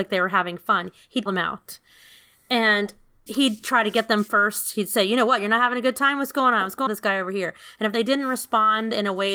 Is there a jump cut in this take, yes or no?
yes